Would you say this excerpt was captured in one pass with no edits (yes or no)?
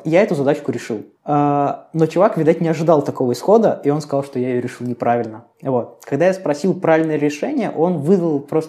no